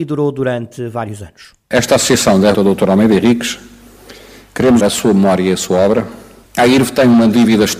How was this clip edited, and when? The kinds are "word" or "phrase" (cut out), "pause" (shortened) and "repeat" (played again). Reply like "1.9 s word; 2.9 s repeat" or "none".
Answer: 2.5 s word; 4.8 s word